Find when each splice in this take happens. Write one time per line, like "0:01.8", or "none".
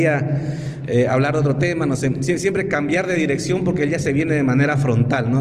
none